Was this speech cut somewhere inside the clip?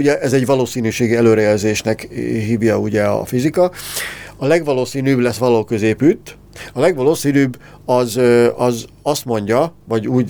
no; 0 cuts

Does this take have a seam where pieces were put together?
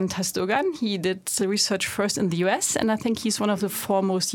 no; 0 cuts

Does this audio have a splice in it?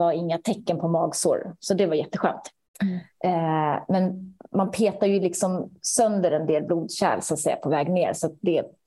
no; 0 cuts

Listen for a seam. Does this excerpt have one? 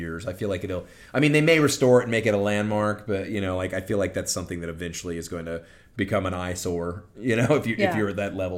no; 0 cuts

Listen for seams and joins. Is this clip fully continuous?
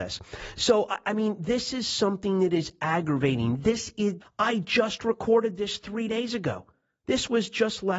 no; 1 cut; at 4.2 s

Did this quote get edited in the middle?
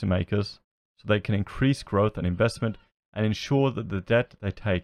no; 0 cuts

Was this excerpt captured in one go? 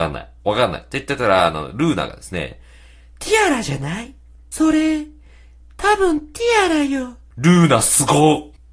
yes; 0 cuts

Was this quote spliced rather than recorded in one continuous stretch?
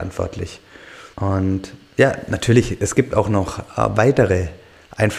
yes; 1 cut; at 1.1 s

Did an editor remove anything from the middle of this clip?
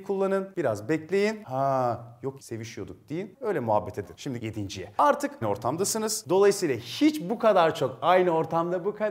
yes; 5 cuts; at 2.4 s, 3.3 s, 4.0 s, 4.4 s, 5.4 s

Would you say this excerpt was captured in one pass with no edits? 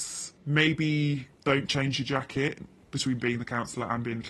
no; 1 cut; at 1.3 s

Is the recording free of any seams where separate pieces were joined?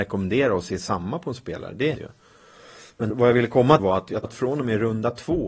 no; 4 cuts; at 1.9 s, 3.1 s, 3.8 s, 4.2 s

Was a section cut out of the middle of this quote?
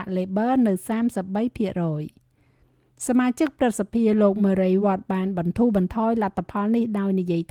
no; 0 cuts

